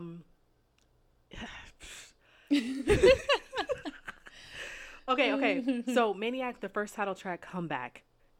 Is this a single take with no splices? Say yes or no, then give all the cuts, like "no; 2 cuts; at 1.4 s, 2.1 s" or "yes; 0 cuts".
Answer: yes; 0 cuts